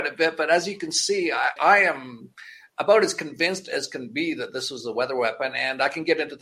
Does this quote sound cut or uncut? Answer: cut